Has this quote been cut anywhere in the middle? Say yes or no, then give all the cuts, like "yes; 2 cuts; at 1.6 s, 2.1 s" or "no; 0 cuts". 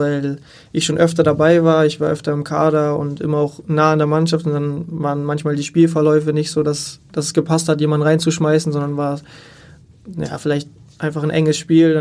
no; 0 cuts